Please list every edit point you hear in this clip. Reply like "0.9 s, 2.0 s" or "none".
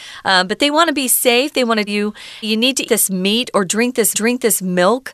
1.9 s, 2.4 s, 2.9 s, 4.1 s

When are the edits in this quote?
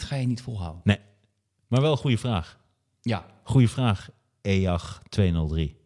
none

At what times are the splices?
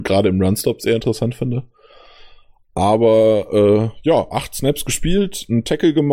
none

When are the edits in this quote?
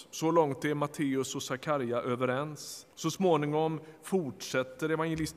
2.9 s

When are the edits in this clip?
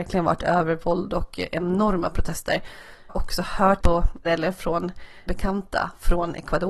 3.1 s, 3.8 s, 4.3 s, 5.3 s

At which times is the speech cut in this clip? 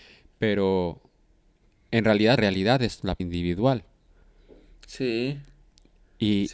1.6 s, 2.4 s, 3.2 s

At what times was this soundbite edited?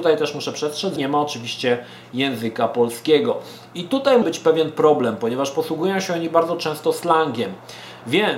1.0 s, 4.2 s

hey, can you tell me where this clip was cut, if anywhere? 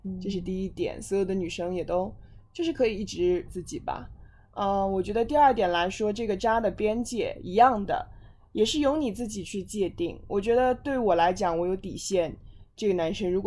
3.5 s

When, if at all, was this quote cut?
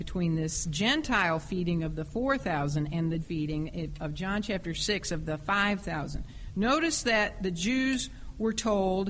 3.2 s

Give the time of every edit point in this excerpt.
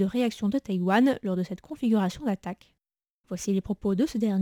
none

